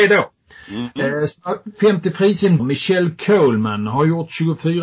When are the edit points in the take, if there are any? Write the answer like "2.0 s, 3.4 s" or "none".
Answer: 2.6 s